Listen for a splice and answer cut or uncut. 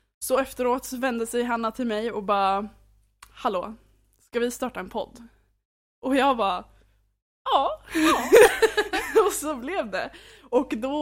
uncut